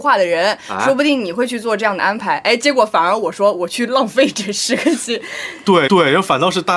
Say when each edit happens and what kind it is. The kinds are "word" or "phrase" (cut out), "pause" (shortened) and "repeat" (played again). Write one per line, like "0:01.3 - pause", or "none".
0:05.9 - repeat